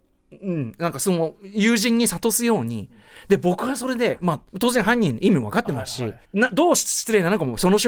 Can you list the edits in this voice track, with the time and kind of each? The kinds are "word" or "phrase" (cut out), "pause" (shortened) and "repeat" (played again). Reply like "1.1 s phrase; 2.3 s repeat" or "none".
4.5 s pause; 6.2 s pause